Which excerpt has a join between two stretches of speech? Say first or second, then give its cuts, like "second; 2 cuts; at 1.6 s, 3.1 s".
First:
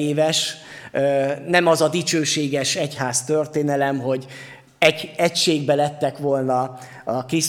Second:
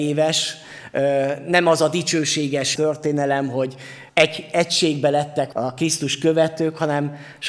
second; 3 cuts; at 2.8 s, 4.1 s, 5.5 s